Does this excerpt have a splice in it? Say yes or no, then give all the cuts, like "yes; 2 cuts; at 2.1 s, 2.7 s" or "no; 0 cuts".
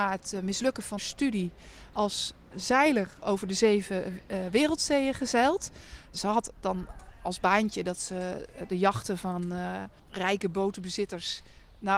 yes; 2 cuts; at 1.0 s, 10.0 s